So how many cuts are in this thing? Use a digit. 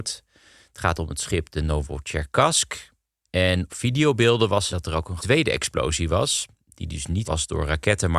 4